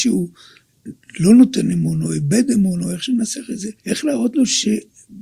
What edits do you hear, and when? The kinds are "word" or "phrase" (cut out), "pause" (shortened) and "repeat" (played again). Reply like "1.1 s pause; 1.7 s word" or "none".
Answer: 3.8 s pause